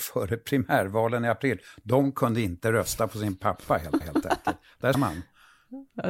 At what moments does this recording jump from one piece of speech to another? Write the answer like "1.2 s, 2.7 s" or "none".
4.0 s, 4.9 s